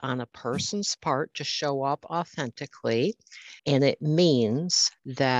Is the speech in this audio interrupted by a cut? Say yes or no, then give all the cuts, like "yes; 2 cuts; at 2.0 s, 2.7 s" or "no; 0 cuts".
yes; 1 cut; at 3.6 s